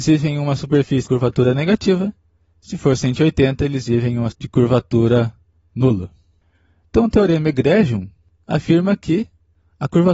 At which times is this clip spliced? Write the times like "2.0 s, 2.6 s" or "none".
1.1 s, 4.3 s

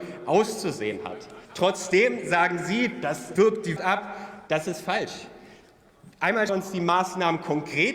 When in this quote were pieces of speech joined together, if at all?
1.4 s, 3.4 s, 3.8 s, 4.5 s, 6.5 s

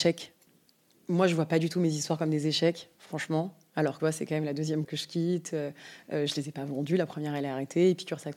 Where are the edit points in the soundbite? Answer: 4.0 s, 4.8 s

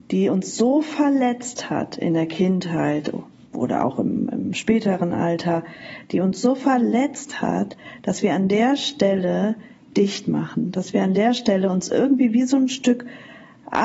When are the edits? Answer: none

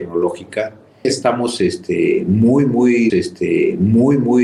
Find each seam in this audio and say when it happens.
1.0 s, 3.1 s

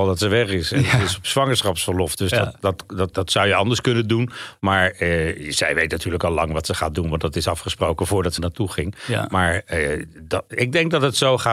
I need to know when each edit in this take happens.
3.1 s, 8.4 s

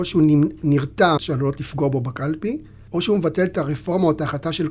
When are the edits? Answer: 1.2 s, 2.9 s

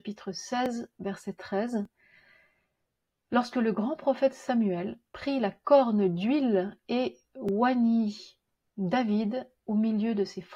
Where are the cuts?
none

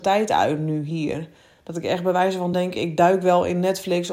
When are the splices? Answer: none

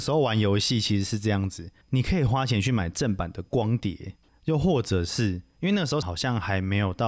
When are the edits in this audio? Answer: 1.8 s, 4.3 s, 6.0 s

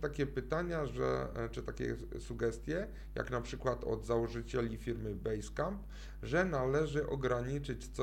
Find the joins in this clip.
none

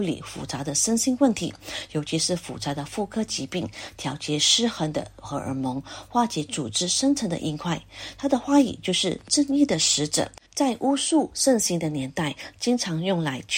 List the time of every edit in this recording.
10.5 s

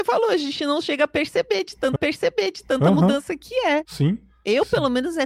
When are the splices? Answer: 2.0 s

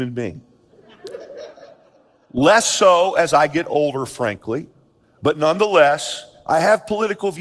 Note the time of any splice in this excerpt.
none

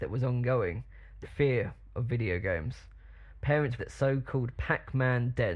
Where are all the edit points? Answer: 1.2 s, 3.8 s

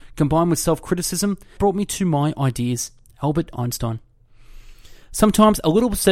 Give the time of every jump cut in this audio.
1.6 s

